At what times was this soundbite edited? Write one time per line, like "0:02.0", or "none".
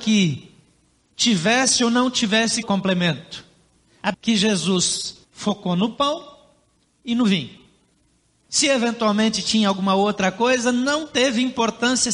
0:02.6
0:04.1
0:05.2